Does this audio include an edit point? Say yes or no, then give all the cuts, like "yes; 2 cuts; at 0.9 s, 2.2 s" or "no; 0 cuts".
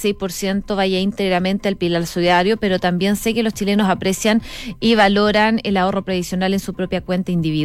no; 0 cuts